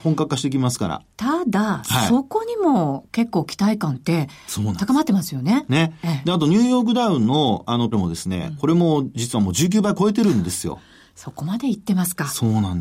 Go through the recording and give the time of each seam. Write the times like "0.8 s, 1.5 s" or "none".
7.9 s